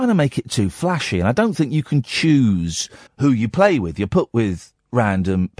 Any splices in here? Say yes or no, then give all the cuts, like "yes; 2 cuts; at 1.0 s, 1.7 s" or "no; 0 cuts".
yes; 1 cut; at 3.1 s